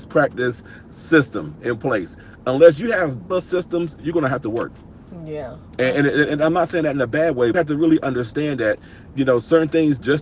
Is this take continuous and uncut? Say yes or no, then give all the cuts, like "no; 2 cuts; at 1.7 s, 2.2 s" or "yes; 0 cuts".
no; 2 cuts; at 3.3 s, 7.5 s